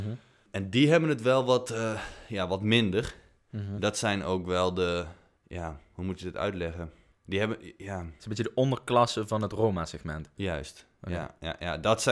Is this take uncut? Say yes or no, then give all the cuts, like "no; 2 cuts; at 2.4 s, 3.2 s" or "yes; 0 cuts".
yes; 0 cuts